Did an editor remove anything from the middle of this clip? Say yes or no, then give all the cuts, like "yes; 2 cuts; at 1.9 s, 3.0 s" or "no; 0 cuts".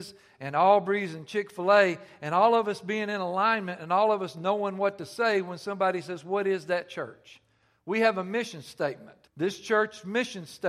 yes; 1 cut; at 9.3 s